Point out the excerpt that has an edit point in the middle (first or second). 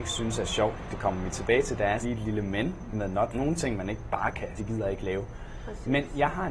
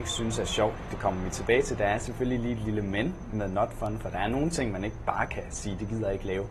first